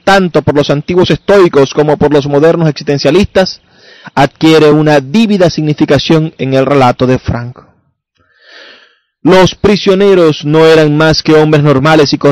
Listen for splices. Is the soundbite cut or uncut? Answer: uncut